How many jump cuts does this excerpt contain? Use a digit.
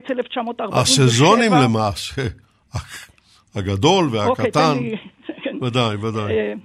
0